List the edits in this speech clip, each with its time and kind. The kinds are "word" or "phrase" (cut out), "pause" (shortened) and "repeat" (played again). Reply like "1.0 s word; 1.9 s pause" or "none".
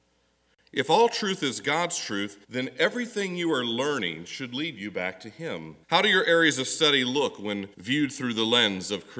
2.4 s pause; 5.8 s pause; 7.7 s pause

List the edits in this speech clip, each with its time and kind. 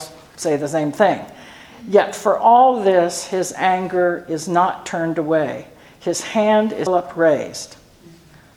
6.9 s word

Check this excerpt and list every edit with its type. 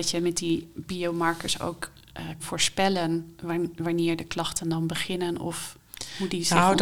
2.4 s word

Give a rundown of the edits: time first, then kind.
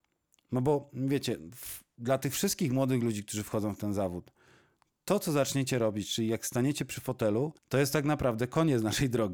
7.6 s pause

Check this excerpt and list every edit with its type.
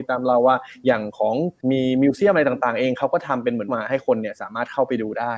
1.6 s pause; 3.7 s word

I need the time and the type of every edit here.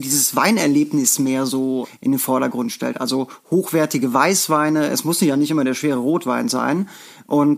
none

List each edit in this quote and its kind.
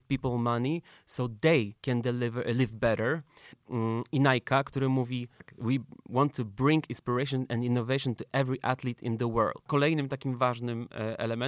1.8 s pause

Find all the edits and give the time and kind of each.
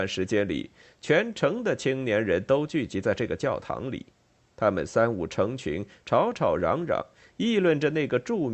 none

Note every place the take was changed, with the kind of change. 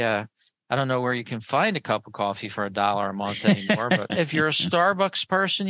4.1 s word

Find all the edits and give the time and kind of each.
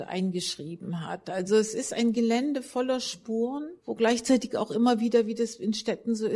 3.8 s pause

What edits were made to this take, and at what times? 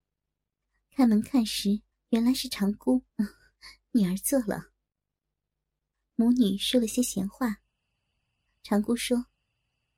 1.9 s pause; 3.1 s pause

